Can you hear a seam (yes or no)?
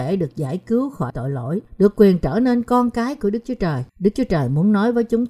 yes